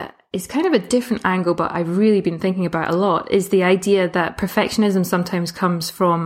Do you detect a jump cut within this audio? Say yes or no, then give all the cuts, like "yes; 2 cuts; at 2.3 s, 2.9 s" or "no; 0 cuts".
no; 0 cuts